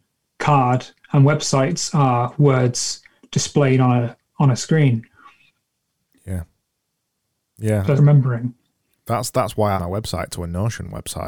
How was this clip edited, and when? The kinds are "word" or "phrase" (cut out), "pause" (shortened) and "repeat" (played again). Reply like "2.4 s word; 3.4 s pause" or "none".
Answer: 8.0 s phrase; 9.8 s phrase